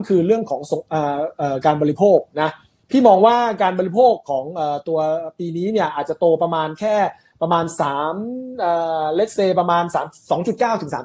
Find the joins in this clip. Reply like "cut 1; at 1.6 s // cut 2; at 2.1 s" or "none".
none